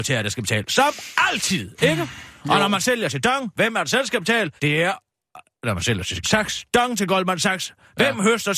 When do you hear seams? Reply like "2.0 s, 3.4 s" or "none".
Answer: 4.6 s, 6.2 s